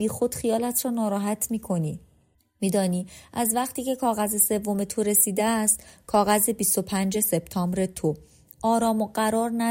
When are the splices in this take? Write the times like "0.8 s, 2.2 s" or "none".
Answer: none